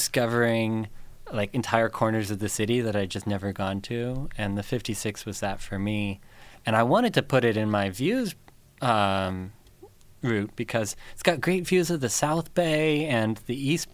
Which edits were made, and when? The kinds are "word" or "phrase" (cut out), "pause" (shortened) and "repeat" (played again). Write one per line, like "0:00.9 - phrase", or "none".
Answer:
none